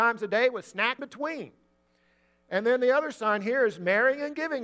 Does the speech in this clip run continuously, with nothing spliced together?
no; 1 cut; at 1.0 s

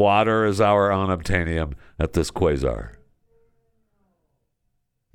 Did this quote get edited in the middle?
no; 0 cuts

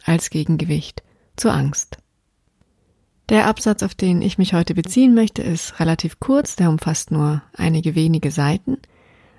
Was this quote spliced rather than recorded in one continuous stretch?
no; 0 cuts

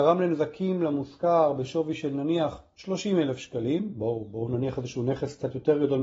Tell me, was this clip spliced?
no; 0 cuts

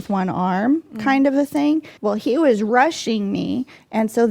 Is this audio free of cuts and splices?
no; 1 cut; at 2.0 s

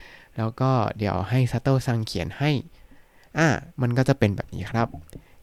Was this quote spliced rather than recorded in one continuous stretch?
yes; 1 cut; at 3.7 s

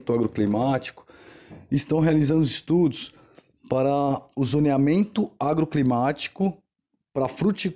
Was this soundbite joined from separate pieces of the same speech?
no; 0 cuts

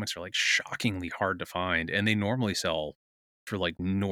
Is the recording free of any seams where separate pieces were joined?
yes; 0 cuts

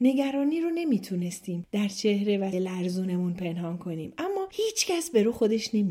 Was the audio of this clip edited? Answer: yes; 1 cut; at 2.5 s

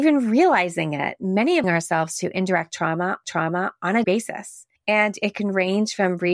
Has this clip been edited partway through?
yes; 4 cuts; at 1.6 s, 3.2 s, 4.0 s, 4.8 s

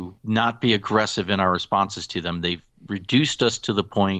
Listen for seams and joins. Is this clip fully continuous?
yes; 0 cuts

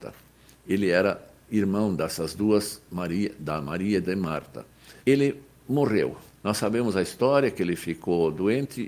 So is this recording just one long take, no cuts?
no; 2 cuts; at 5.0 s, 6.3 s

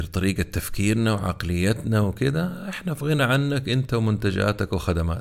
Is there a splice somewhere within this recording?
no; 0 cuts

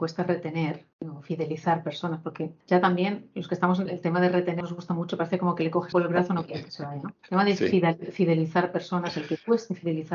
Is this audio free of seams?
no; 6 cuts; at 0.9 s, 2.6 s, 3.9 s, 4.6 s, 5.9 s, 7.2 s

